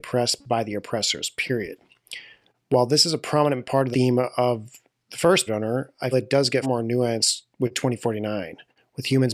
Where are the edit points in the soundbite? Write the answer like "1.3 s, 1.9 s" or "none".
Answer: 3.9 s, 5.5 s, 6.1 s, 6.6 s